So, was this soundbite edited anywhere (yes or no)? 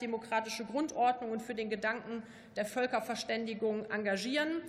no